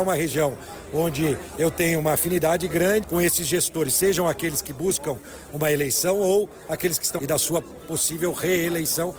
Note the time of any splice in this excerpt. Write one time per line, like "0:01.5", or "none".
0:03.0
0:07.2